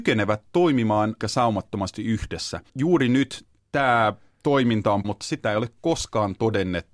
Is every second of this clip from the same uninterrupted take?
no; 4 cuts; at 1.2 s, 2.7 s, 3.6 s, 5.0 s

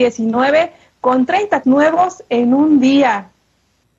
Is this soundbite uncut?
no; 1 cut; at 1.6 s

